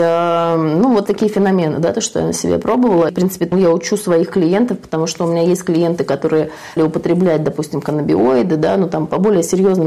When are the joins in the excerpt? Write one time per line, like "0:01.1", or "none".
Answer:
0:01.1
0:03.1
0:03.5
0:06.8